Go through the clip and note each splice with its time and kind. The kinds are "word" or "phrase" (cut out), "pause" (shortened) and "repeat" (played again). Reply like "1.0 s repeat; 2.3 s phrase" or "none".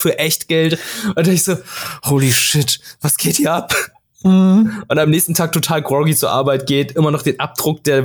none